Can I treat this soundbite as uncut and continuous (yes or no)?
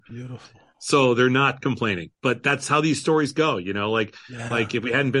no